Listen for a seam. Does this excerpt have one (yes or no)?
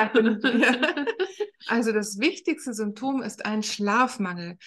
no